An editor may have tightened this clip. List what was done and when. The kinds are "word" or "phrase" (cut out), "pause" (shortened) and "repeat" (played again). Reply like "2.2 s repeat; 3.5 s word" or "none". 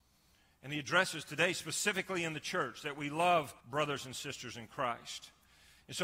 3.6 s pause